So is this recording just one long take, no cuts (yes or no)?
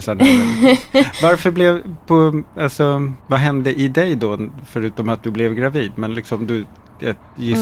no